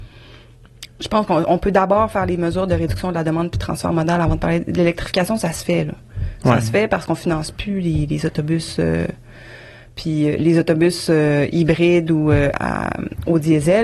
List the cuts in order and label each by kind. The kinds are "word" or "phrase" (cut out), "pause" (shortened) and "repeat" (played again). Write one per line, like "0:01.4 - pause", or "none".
none